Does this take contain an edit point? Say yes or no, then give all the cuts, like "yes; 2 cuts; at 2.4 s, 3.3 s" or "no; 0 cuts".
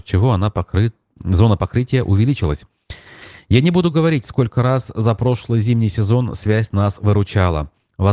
no; 0 cuts